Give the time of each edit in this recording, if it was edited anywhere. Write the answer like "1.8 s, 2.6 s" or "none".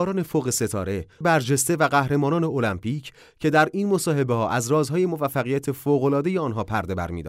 1.2 s